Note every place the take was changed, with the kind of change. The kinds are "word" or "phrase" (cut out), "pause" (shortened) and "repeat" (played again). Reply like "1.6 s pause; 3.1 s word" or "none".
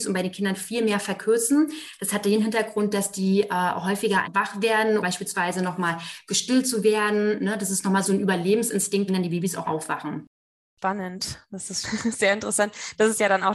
4.2 s word; 5.0 s word; 8.0 s word; 9.1 s word; 9.7 s word; 11.8 s word